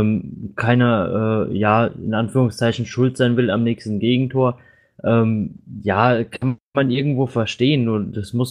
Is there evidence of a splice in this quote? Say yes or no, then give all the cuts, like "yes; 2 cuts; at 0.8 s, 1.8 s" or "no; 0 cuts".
no; 0 cuts